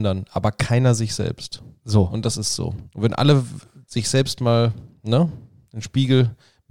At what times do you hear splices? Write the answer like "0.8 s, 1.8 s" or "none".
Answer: none